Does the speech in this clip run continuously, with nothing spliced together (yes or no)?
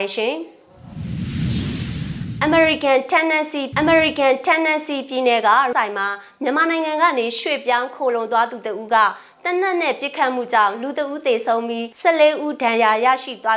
no